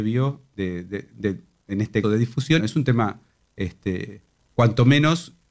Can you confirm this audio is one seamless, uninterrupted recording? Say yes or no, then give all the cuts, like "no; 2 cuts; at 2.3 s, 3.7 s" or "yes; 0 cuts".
no; 3 cuts; at 2.0 s, 2.6 s, 4.4 s